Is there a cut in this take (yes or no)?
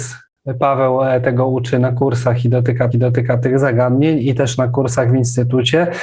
yes